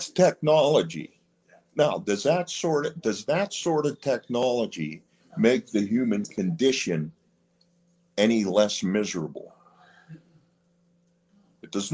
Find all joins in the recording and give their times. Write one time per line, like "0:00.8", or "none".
none